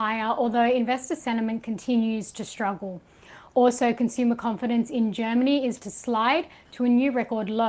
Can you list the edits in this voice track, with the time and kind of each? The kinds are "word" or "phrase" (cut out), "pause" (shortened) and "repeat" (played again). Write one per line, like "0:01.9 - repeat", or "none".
0:05.8 - word

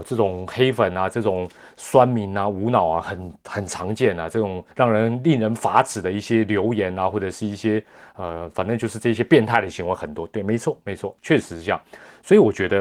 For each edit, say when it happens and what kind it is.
0:04.7 - pause

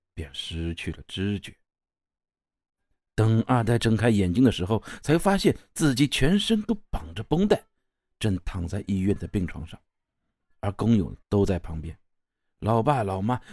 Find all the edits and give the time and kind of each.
0:11.2 - pause

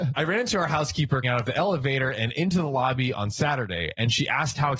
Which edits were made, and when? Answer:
0:01.2 - word

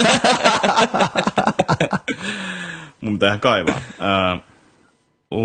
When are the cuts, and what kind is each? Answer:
none

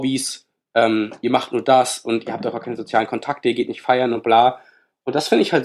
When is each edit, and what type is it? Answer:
none

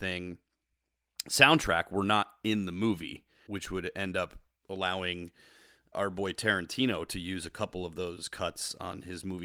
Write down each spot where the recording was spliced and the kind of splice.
0:03.5 - word
0:05.9 - word

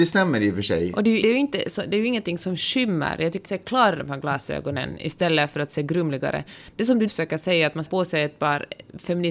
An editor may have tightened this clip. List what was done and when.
0:01.2 - word
0:03.4 - word
0:04.0 - word
0:07.1 - word
0:07.8 - word

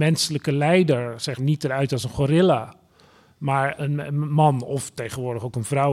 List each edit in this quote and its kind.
0:01.4 - word
0:01.9 - word
0:03.8 - word

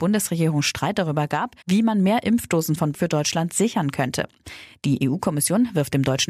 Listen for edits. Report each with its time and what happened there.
0:01.6 - pause
0:02.9 - word

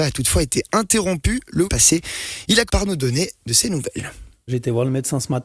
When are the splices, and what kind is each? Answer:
0:01.7 - word
0:02.7 - word

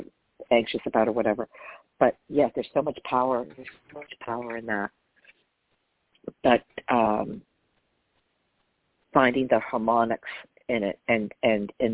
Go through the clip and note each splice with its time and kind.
0:03.9 - word

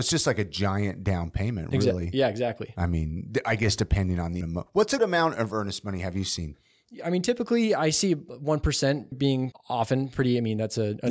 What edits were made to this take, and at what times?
0:04.4 - word
0:05.0 - word
0:09.1 - word
0:09.5 - word

